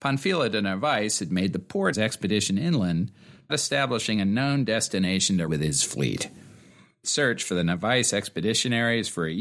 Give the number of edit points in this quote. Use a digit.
4